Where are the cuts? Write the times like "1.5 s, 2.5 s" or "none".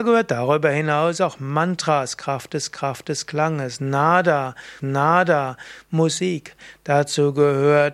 2.7 s, 4.8 s